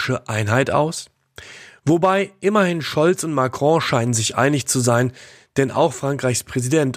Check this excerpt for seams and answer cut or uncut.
uncut